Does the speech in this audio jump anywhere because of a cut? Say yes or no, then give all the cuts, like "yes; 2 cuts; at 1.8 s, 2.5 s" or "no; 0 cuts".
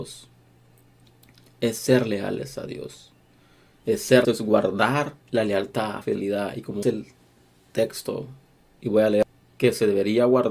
yes; 4 cuts; at 4.2 s, 5.2 s, 6.0 s, 6.8 s